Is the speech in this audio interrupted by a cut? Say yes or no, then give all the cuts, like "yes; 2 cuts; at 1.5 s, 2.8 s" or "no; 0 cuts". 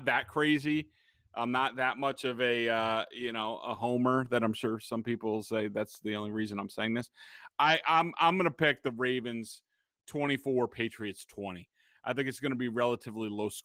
no; 0 cuts